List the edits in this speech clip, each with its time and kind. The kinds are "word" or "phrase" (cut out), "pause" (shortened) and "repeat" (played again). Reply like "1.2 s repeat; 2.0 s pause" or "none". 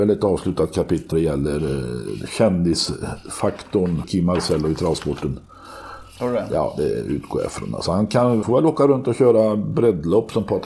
1.1 s word; 4.0 s word; 8.4 s word